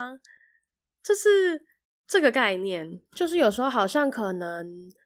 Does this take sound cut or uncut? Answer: cut